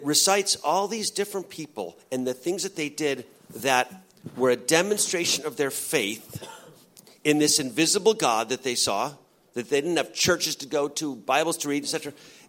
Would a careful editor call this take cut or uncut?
uncut